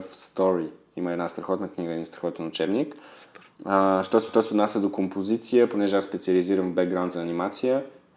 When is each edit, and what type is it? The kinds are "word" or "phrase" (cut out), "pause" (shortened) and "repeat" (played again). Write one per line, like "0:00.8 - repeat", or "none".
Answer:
0:03.5 - pause
0:04.3 - repeat
0:07.1 - phrase

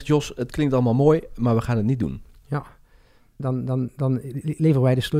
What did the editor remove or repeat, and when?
0:03.4 - word

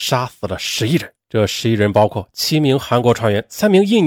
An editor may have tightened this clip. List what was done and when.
0:01.2 - pause

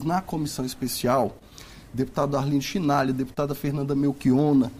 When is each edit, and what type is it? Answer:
none

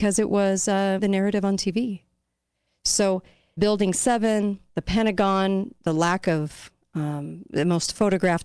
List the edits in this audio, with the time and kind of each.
0:01.0 - word
0:03.6 - word
0:04.7 - pause
0:05.8 - pause

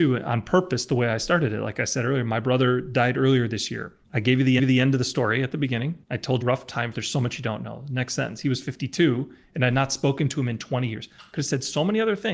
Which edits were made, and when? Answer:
0:04.0 - pause
0:04.6 - repeat
0:06.0 - pause
0:06.4 - word
0:06.9 - phrase

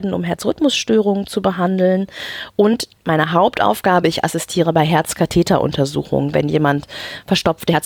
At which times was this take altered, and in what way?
none

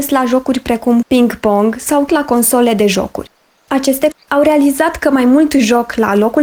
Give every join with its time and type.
0:01.0 - word
0:02.1 - word
0:04.1 - word

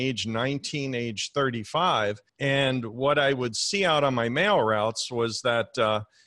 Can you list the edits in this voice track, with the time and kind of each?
0:02.3 - pause

